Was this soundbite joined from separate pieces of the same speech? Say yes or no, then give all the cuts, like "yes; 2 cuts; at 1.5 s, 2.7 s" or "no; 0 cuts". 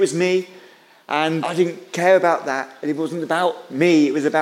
yes; 1 cut; at 1.4 s